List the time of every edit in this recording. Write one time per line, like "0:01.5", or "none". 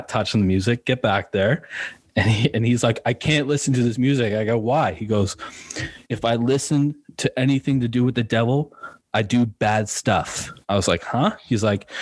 0:06.0
0:10.6